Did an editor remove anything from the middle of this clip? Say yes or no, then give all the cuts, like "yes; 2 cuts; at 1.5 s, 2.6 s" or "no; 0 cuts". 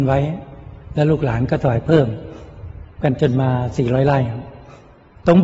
no; 0 cuts